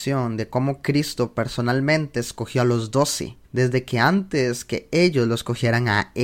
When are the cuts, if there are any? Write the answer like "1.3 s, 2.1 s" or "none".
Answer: 3.4 s